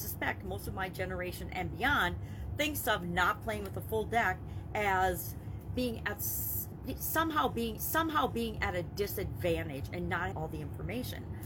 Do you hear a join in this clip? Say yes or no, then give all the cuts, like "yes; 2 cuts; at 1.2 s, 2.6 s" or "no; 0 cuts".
yes; 2 cuts; at 7.8 s, 10.3 s